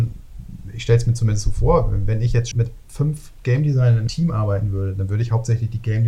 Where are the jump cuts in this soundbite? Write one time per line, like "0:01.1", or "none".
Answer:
0:02.5
0:04.1